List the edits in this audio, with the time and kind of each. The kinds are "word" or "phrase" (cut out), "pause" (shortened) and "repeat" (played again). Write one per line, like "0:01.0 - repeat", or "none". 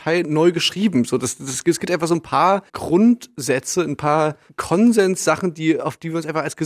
0:02.7 - pause